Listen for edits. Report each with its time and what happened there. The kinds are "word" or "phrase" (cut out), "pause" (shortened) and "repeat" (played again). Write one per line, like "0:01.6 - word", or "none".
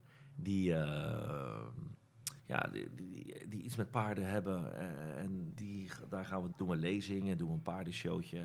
0:02.4 - pause
0:06.5 - word